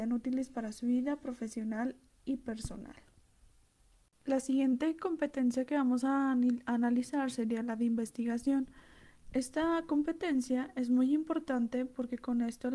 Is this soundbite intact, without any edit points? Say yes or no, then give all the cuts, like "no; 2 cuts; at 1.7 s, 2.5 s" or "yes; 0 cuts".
yes; 0 cuts